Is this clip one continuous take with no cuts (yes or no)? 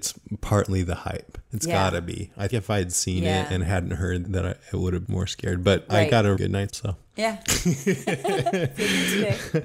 no